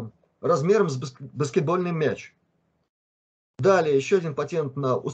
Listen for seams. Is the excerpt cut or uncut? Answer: uncut